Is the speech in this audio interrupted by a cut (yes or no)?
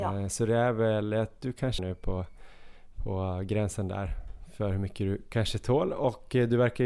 yes